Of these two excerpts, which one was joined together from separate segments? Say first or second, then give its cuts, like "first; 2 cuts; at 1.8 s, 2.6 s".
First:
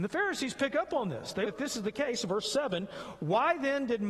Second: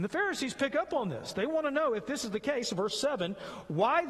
first; 1 cut; at 1.5 s